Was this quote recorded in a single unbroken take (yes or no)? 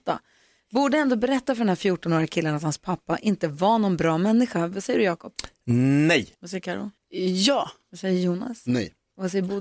no